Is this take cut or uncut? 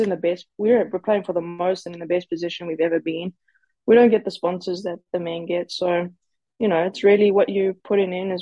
uncut